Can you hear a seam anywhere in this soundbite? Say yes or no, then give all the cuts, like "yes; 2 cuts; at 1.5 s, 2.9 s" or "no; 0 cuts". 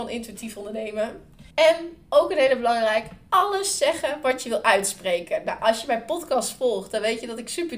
yes; 1 cut; at 1.5 s